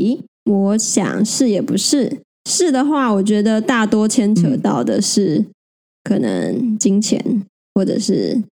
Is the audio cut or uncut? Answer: uncut